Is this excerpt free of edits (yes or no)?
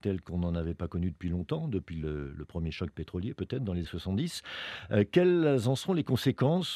no